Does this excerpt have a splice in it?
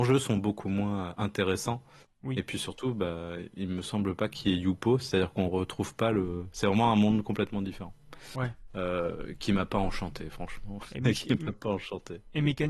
no; 0 cuts

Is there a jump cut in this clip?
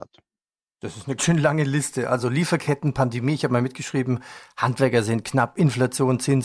yes; 1 cut; at 1.2 s

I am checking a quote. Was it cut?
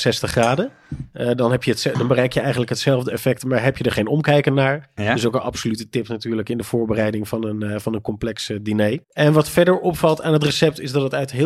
yes; 1 cut; at 9.0 s

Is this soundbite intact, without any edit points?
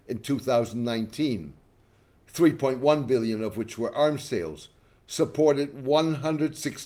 yes; 0 cuts

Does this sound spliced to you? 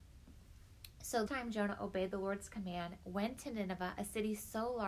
yes; 1 cut; at 1.3 s

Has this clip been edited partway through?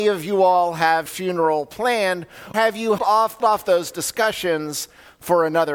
yes; 4 cuts; at 1.1 s, 2.5 s, 3.0 s, 3.4 s

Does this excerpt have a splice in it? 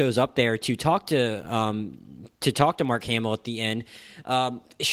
no; 0 cuts

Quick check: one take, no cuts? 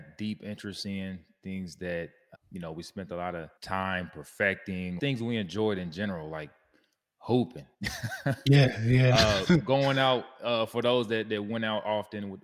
no; 4 cuts; at 2.3 s, 3.6 s, 5.0 s, 7.7 s

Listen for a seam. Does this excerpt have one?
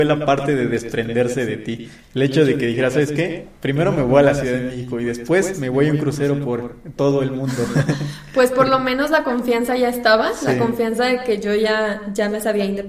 no; 0 cuts

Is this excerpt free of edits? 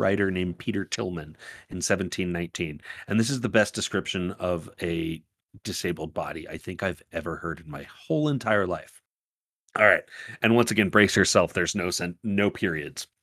yes; 0 cuts

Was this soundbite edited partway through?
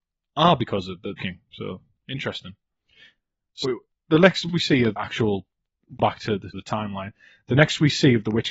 yes; 7 cuts; at 1.2 s, 2.0 s, 3.6 s, 4.5 s, 5.0 s, 6.0 s, 6.5 s

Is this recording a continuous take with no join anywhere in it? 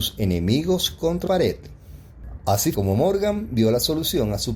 no; 2 cuts; at 1.3 s, 2.7 s

